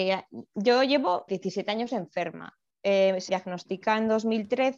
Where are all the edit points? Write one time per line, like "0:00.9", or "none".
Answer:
0:01.3
0:03.3